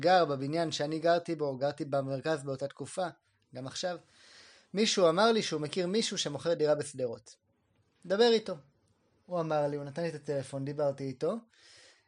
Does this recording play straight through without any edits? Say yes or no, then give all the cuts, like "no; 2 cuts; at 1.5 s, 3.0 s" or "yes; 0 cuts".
yes; 0 cuts